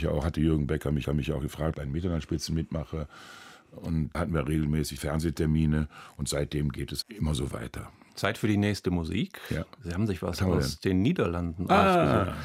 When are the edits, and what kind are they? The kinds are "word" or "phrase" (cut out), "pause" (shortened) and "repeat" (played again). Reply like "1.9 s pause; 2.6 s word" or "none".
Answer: 1.0 s repeat; 1.7 s phrase; 4.1 s word; 5.0 s word; 7.0 s word; 8.1 s pause